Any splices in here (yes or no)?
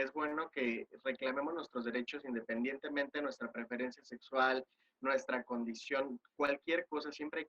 no